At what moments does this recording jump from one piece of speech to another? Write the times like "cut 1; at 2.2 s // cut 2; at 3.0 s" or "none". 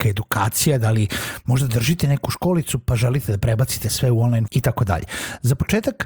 cut 1; at 4.5 s